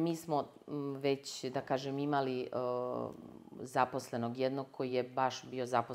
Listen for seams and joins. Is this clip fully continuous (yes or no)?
yes